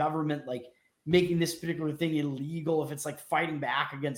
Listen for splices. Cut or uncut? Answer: uncut